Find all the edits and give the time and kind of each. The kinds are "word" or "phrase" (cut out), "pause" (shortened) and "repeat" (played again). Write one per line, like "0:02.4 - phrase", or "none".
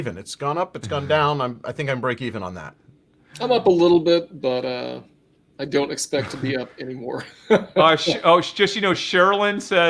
none